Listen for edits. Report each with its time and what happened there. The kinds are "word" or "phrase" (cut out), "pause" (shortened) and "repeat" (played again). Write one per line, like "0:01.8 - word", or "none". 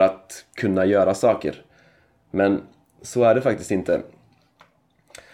none